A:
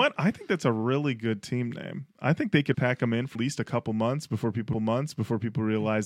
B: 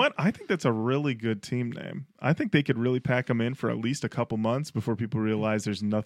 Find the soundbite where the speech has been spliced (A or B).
A